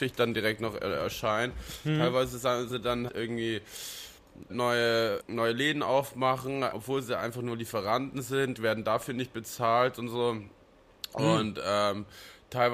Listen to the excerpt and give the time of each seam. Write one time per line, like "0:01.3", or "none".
0:02.7
0:03.1
0:04.5
0:05.2
0:06.7
0:08.5